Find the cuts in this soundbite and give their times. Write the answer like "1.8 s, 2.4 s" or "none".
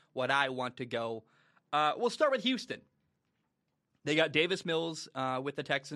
none